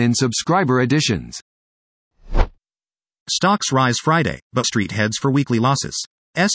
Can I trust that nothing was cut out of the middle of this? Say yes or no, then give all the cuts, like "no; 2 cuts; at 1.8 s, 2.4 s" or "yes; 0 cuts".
no; 1 cut; at 4.6 s